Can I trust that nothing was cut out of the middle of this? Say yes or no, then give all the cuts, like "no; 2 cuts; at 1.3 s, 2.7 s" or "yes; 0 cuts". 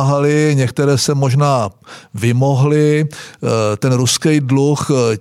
yes; 0 cuts